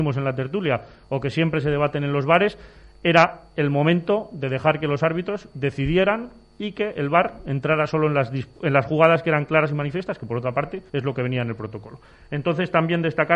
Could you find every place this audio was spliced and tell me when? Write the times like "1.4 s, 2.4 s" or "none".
10.9 s